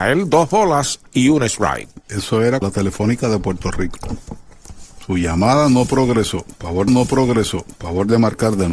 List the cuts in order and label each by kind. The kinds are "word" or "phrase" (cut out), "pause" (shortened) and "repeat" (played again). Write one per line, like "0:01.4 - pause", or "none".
0:02.6 - word
0:06.9 - repeat